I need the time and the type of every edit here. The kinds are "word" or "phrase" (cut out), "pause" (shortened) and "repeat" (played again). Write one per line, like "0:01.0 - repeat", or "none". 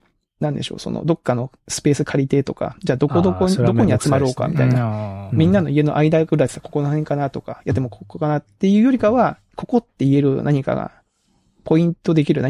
none